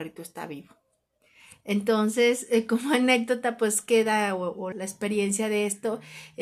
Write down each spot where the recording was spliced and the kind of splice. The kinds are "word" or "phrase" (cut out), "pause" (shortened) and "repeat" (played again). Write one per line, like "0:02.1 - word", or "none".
0:04.7 - word